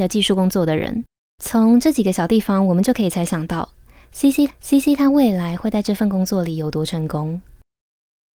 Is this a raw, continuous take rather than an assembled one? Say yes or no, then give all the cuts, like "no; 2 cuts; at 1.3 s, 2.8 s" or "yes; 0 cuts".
no; 2 cuts; at 1.2 s, 4.5 s